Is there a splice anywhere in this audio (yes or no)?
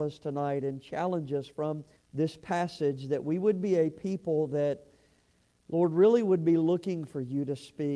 yes